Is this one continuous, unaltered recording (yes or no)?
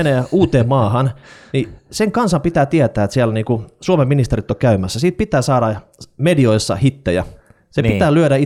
yes